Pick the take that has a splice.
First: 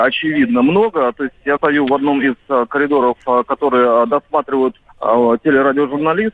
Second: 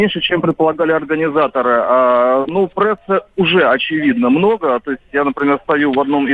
first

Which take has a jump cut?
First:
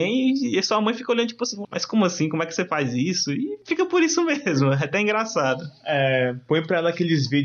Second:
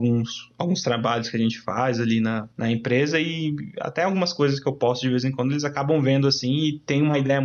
first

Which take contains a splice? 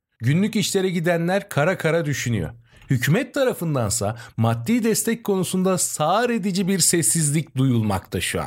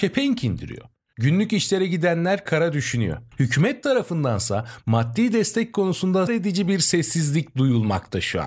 second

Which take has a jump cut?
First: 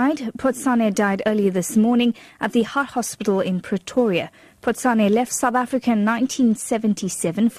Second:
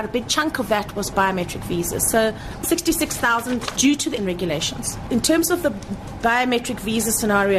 second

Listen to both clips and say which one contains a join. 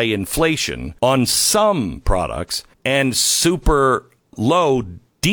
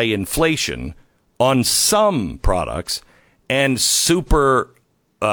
first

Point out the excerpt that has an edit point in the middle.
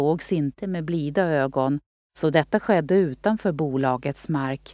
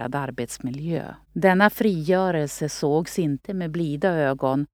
second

